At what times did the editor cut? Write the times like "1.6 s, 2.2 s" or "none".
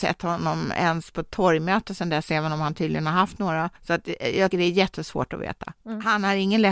3.8 s, 4.5 s